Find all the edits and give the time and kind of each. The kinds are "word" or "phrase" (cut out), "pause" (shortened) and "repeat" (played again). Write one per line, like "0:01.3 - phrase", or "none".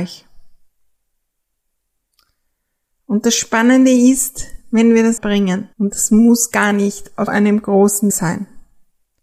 0:05.2 - phrase
0:05.7 - pause
0:07.3 - word
0:08.1 - word